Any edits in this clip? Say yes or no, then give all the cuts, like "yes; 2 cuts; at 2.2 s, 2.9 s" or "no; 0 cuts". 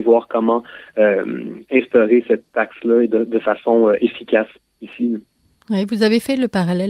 no; 0 cuts